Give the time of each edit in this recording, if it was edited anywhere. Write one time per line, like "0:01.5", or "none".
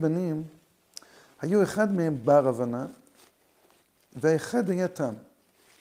none

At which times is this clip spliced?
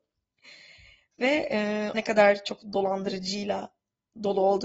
0:01.9

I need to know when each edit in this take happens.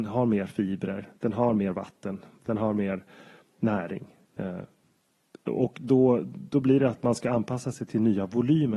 none

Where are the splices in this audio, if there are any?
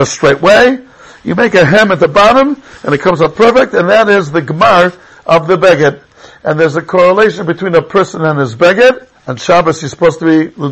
0:09.2

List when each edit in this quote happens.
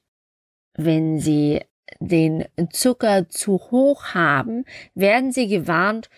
none

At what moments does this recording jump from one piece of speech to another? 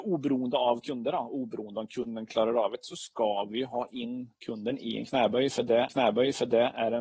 0:04.4
0:05.9

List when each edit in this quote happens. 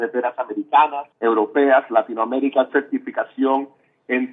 0:01.1
0:02.7

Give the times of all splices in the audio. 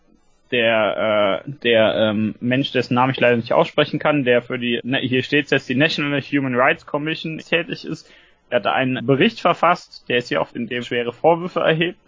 0:01.4
0:04.8
0:07.4
0:09.0
0:10.5
0:10.8

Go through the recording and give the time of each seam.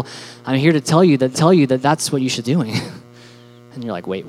0:01.3
0:02.4

